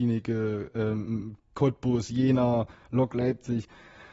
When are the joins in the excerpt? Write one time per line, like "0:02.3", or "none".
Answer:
none